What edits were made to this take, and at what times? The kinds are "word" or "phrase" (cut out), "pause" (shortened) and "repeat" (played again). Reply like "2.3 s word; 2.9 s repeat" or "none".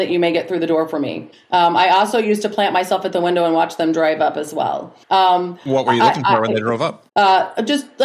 1.3 s pause; 5.0 s pause; 7.1 s pause